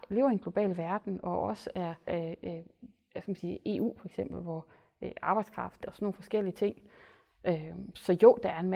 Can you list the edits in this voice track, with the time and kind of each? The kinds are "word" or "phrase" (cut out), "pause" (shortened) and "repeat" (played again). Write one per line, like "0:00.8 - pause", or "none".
0:02.1 - phrase
0:05.8 - phrase